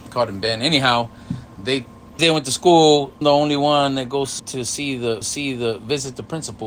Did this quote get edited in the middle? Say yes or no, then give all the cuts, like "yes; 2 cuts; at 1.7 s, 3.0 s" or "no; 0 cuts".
yes; 4 cuts; at 2.2 s, 3.2 s, 4.4 s, 5.2 s